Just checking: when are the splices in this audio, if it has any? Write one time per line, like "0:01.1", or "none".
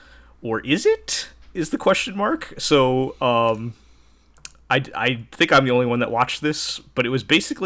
0:01.4